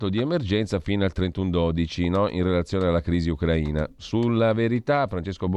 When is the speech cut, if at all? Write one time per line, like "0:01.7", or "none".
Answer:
none